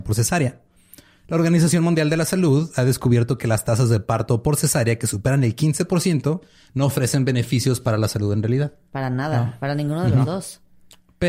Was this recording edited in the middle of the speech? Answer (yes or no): no